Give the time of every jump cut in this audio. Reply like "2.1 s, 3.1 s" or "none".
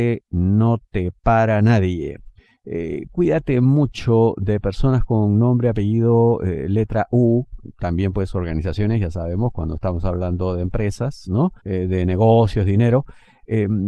2.4 s, 11.6 s